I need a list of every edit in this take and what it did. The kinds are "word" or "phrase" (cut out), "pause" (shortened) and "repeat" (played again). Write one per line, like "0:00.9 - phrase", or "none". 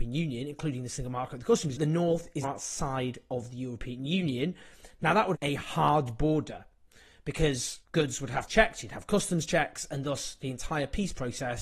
0:01.8 - phrase
0:02.4 - word
0:05.3 - phrase
0:07.8 - pause
0:08.5 - phrase

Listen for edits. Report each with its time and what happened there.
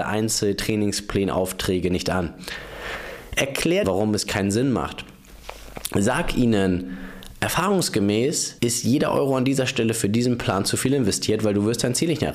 0:03.8 - phrase
0:08.6 - pause

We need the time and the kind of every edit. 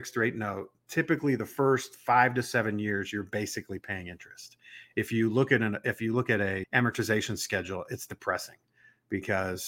0:06.6 - word

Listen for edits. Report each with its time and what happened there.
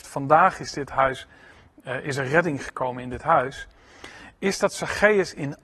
none

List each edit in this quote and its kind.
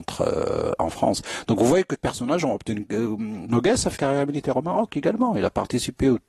0:02.0 - phrase
0:04.0 - word

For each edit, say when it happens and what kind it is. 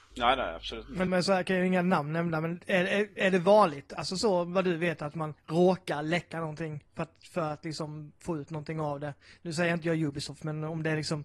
0:01.1 - phrase
0:05.4 - pause
0:06.9 - pause

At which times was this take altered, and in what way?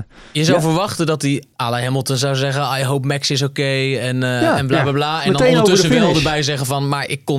0:01.5 - pause

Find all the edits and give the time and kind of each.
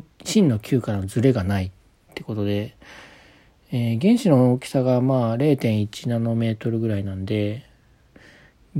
none

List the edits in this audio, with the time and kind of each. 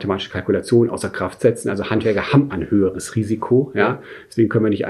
0:02.5 - word

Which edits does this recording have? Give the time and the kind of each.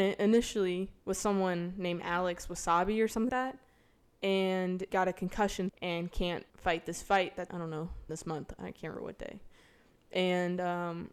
0:01.0 - pause
0:03.3 - word
0:04.9 - word
0:05.7 - word
0:06.5 - pause
0:07.5 - word
0:08.1 - word
0:08.9 - word

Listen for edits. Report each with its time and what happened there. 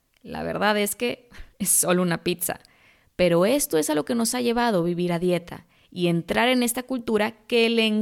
none

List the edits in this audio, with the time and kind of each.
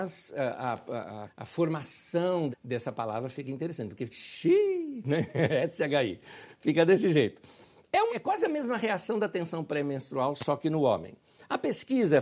0:01.3 - word
0:02.5 - word
0:04.1 - word
0:08.1 - word

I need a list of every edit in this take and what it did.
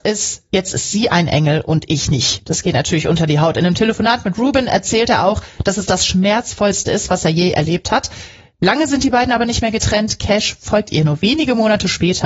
none

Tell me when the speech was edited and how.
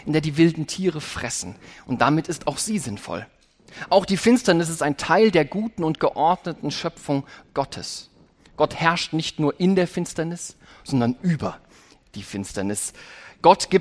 none

